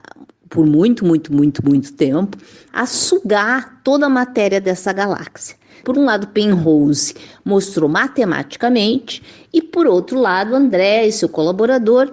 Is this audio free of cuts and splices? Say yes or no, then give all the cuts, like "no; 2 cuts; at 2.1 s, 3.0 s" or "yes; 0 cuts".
yes; 0 cuts